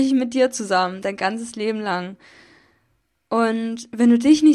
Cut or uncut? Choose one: uncut